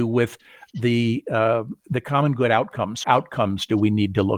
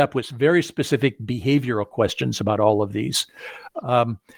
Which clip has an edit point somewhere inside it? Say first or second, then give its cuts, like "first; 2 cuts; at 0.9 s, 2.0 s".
first; 2 cuts; at 1.8 s, 3.0 s